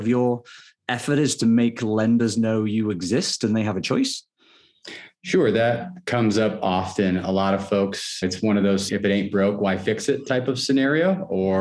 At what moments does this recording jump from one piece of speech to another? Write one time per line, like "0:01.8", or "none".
0:08.2
0:08.9